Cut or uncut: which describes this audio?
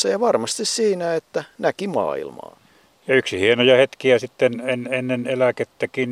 uncut